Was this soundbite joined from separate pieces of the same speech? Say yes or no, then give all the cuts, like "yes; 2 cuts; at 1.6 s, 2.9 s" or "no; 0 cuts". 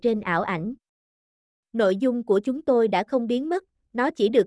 no; 0 cuts